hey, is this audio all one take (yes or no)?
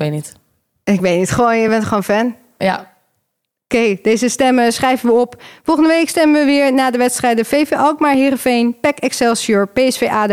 yes